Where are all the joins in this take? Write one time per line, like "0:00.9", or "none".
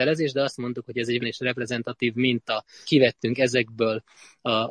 0:01.2
0:02.8